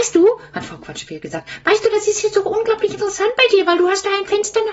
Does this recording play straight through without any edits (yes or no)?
yes